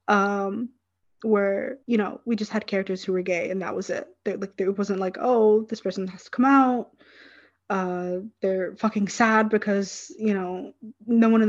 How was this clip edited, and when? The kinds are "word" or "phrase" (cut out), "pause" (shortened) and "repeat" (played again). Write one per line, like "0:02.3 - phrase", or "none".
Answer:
0:01.8 - pause